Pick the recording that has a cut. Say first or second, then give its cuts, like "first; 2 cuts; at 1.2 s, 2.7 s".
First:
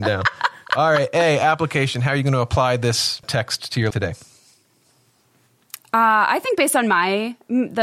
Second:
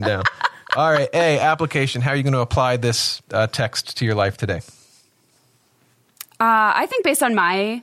first; 2 cuts; at 3.2 s, 3.9 s